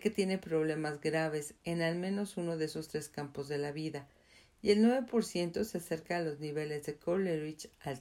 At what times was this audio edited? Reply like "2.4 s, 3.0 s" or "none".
none